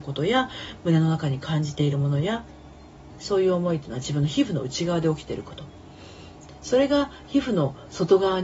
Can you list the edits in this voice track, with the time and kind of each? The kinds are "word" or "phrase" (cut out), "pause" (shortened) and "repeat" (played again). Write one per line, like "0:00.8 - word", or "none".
0:03.2 - word